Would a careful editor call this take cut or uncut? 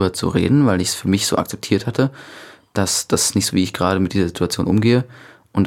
cut